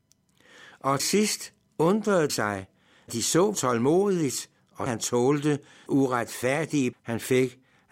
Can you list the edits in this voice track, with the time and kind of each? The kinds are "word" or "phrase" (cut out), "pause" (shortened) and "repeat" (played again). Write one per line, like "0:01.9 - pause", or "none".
0:01.0 - word
0:02.3 - word
0:03.1 - word
0:03.5 - word
0:04.9 - word
0:05.9 - word
0:06.9 - word